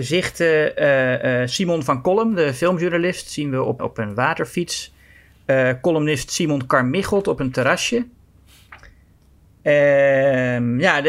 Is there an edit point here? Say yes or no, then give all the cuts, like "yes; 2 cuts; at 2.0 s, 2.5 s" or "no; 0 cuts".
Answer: yes; 1 cut; at 3.8 s